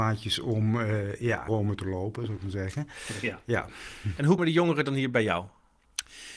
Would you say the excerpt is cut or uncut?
cut